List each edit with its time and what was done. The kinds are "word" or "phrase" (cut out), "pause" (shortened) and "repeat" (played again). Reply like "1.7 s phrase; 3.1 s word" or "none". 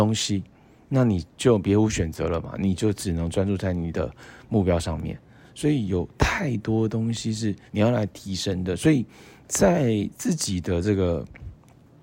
7.7 s pause